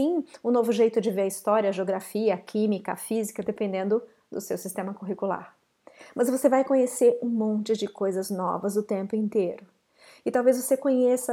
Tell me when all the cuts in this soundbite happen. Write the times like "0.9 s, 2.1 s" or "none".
none